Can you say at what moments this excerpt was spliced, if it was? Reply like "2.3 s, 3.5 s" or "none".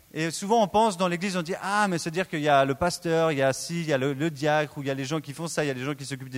none